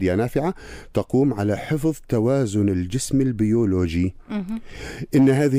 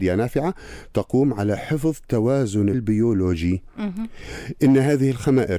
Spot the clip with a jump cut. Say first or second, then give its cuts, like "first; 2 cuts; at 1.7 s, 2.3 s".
second; 1 cut; at 2.7 s